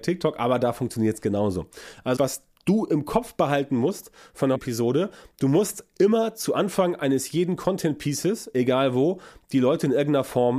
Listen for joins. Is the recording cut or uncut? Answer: cut